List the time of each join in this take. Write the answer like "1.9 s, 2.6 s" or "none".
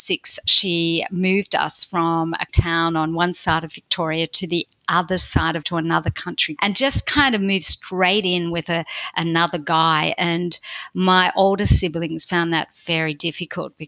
2.5 s, 5.6 s, 6.6 s